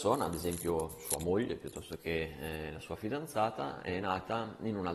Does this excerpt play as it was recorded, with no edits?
yes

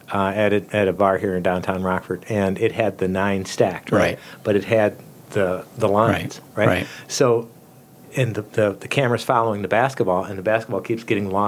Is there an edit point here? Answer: no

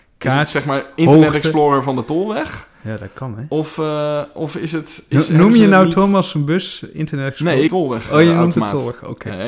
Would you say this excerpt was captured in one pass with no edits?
no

